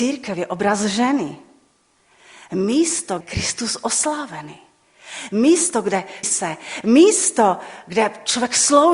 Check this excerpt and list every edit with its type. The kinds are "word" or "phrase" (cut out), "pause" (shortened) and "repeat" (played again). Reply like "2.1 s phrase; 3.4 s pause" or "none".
3.2 s phrase; 6.2 s phrase

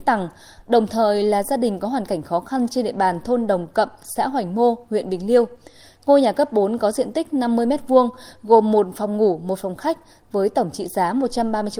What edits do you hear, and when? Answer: none

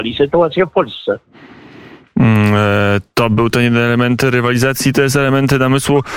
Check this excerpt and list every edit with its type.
none

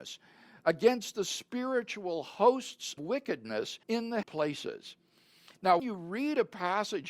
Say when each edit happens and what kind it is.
3.0 s word; 3.8 s pause; 4.2 s word; 5.8 s word

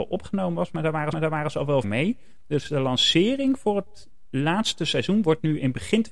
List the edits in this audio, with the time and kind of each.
1.1 s repeat; 1.8 s word

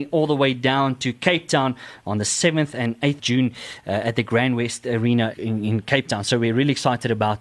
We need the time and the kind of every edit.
3.2 s word; 5.3 s word

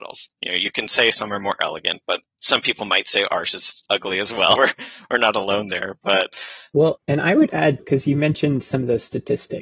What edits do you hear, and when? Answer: 4.6 s word; 6.9 s word; 7.8 s word

